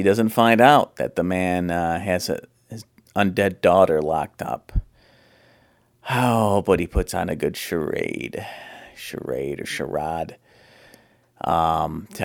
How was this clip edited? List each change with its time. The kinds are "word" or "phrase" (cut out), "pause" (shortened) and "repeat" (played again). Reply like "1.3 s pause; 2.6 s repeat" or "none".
none